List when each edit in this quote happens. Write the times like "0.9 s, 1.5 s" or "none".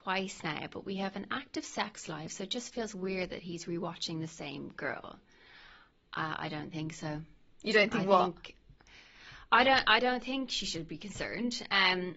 none